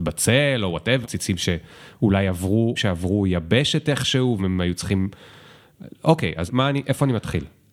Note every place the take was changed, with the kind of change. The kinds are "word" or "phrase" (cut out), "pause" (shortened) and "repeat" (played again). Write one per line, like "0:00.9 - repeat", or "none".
0:01.0 - word
0:02.8 - phrase
0:04.4 - word
0:06.5 - phrase